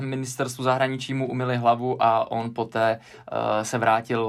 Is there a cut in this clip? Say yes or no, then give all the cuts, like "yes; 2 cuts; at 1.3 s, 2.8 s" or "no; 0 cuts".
no; 0 cuts